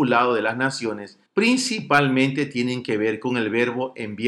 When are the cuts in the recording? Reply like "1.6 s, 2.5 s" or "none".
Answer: 1.3 s